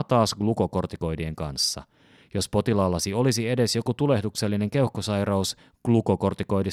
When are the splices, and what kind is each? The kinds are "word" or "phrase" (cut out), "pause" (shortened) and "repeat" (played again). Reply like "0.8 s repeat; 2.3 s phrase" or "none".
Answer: none